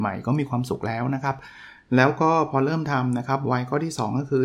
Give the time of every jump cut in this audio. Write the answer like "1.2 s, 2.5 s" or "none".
none